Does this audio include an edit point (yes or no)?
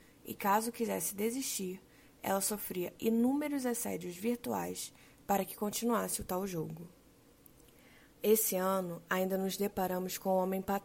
no